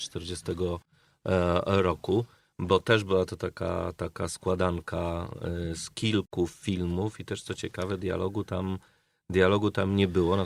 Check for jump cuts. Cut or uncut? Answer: uncut